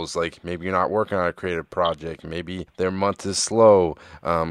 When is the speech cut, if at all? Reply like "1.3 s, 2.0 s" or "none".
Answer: 2.7 s